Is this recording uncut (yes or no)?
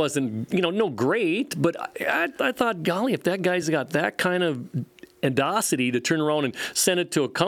yes